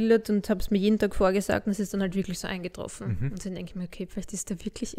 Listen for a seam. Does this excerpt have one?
no; 0 cuts

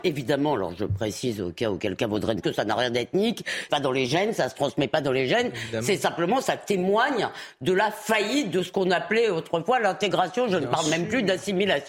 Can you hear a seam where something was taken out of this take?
yes; 2 cuts; at 2.4 s, 3.7 s

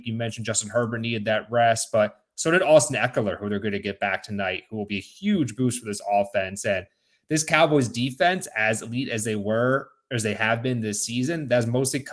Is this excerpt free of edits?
yes; 0 cuts

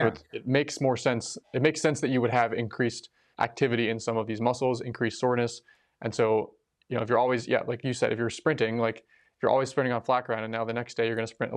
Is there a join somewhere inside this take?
yes; 1 cut; at 3.3 s

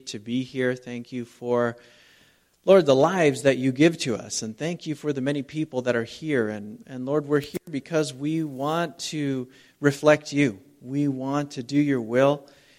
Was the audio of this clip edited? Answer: no; 0 cuts

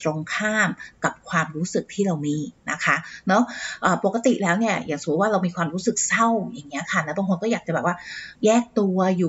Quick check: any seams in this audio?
yes; 1 cut; at 8.4 s

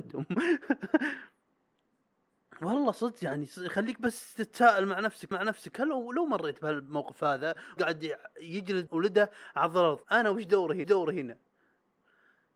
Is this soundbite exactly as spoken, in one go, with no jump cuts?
no; 5 cuts; at 5.3 s, 7.8 s, 8.9 s, 10.0 s, 10.8 s

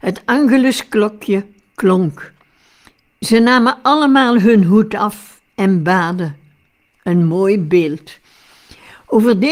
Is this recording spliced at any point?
no; 0 cuts

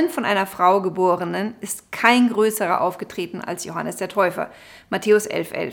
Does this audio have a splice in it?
no; 0 cuts

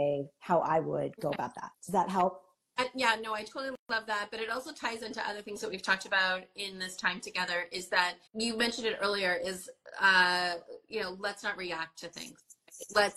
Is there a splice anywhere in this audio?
yes; 2 cuts; at 1.7 s, 8.3 s

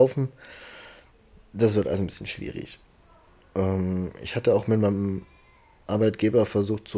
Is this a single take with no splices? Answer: yes; 0 cuts

